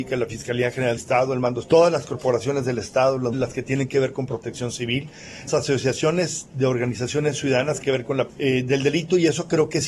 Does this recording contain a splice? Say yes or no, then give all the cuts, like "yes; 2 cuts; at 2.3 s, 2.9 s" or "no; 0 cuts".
yes; 6 cuts; at 1.0 s, 1.6 s, 3.3 s, 5.5 s, 7.8 s, 8.3 s